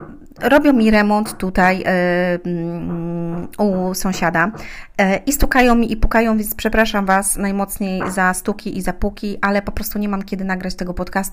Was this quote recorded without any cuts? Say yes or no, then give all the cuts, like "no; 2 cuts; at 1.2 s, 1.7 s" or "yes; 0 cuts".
yes; 0 cuts